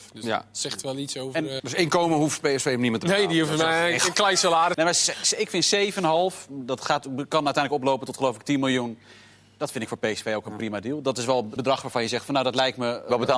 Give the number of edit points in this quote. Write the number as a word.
three